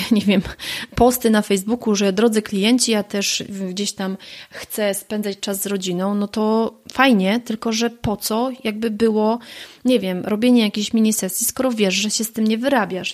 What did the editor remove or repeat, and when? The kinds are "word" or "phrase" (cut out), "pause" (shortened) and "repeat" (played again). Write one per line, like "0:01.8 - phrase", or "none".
none